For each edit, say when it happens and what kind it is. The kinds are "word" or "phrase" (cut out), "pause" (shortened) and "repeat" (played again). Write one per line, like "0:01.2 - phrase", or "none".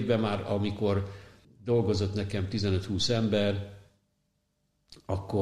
0:01.4 - pause